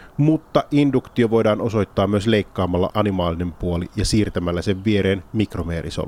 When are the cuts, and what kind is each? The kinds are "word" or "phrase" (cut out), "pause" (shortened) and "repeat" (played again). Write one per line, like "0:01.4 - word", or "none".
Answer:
0:02.9 - word